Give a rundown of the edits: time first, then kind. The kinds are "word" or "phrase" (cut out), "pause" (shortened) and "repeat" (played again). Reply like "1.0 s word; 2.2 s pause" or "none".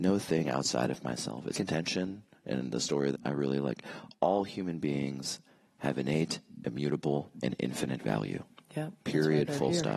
1.5 s word; 3.1 s word; 9.0 s pause